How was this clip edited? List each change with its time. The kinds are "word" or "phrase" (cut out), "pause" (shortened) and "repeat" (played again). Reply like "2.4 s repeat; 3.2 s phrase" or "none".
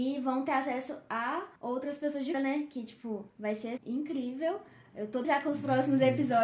1.6 s pause; 2.3 s word; 3.3 s pause; 3.8 s word; 5.2 s word

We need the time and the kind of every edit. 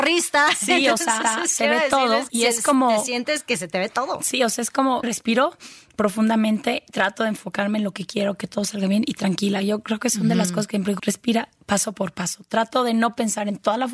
1.2 s repeat; 2.3 s word; 5.0 s word; 11.0 s word

